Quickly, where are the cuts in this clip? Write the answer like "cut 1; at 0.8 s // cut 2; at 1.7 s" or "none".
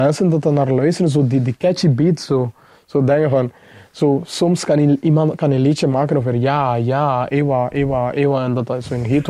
none